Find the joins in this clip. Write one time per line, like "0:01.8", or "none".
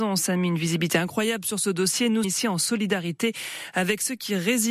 0:02.2